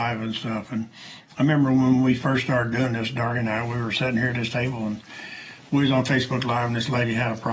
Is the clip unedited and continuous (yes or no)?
yes